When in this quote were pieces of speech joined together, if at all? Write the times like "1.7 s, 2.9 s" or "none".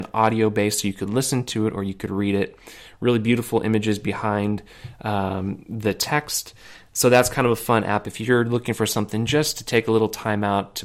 none